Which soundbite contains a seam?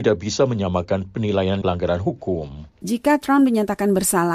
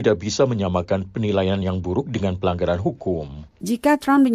first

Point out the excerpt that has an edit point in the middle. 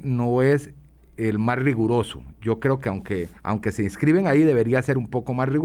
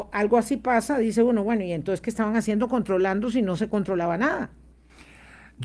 first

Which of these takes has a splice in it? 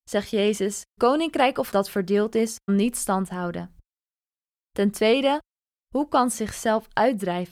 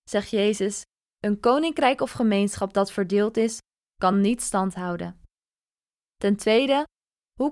first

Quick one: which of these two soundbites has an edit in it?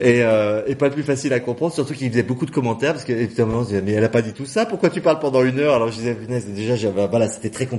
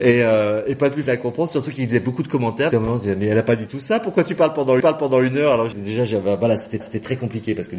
second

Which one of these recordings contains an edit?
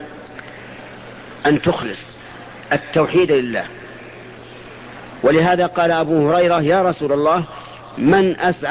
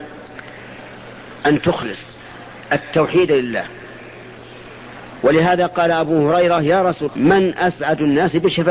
second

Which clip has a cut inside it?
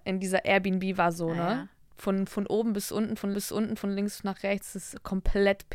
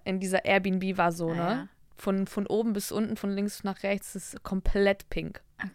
first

